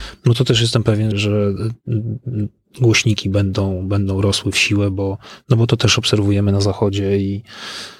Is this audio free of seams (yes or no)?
no